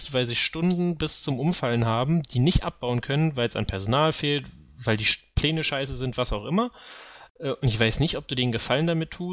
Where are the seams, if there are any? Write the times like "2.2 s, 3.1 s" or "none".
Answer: none